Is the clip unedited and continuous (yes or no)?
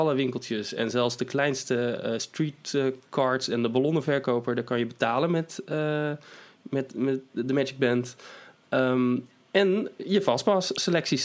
yes